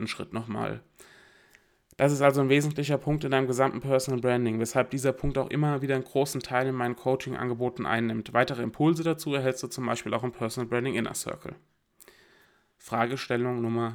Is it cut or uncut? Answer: uncut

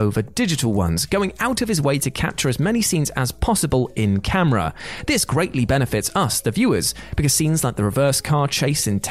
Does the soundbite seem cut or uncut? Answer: uncut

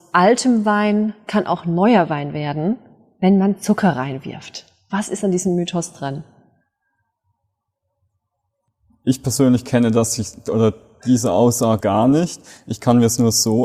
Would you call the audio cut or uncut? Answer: cut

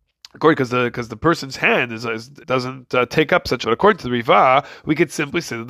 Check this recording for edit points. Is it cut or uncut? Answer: cut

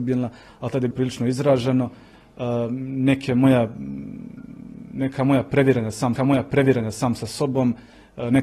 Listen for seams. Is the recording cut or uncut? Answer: cut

